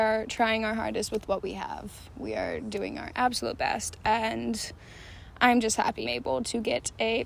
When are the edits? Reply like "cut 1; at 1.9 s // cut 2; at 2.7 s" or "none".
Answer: cut 1; at 6.0 s